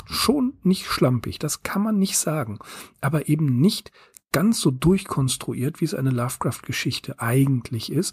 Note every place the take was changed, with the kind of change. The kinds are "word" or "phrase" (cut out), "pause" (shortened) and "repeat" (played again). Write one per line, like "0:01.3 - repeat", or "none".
none